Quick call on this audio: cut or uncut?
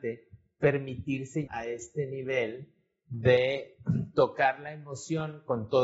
cut